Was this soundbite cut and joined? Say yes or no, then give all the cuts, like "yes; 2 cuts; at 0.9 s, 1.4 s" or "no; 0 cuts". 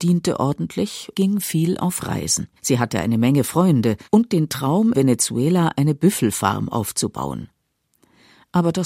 yes; 4 cuts; at 1.1 s, 2.6 s, 4.0 s, 4.9 s